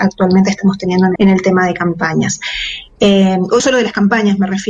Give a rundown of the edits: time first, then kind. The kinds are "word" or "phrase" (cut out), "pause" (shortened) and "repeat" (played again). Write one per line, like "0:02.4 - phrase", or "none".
0:01.2 - word
0:03.6 - word